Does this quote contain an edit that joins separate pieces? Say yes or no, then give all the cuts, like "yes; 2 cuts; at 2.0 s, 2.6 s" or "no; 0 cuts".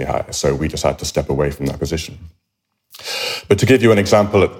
no; 0 cuts